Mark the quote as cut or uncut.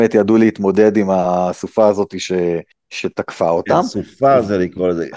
cut